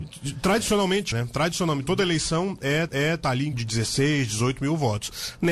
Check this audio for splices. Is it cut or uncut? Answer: cut